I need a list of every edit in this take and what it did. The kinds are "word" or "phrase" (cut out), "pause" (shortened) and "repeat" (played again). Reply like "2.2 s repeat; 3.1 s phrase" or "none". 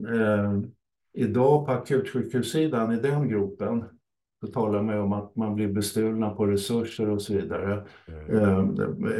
none

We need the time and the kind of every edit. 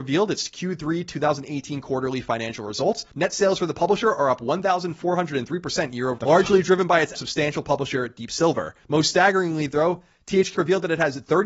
3.1 s pause; 6.2 s word; 7.1 s phrase; 8.8 s pause; 10.5 s word

